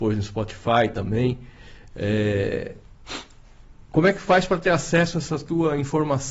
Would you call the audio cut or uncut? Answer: uncut